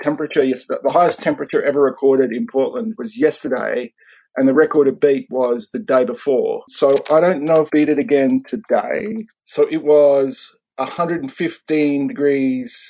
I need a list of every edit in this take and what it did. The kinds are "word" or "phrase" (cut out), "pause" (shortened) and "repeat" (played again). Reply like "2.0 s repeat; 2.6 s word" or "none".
7.7 s word